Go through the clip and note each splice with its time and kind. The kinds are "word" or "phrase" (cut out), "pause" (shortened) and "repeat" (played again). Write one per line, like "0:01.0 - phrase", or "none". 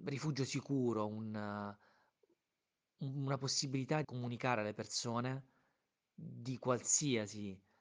0:04.0 - word